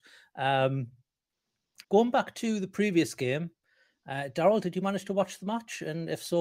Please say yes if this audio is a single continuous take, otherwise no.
no